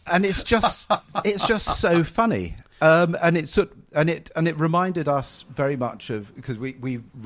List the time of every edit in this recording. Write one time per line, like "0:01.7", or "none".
none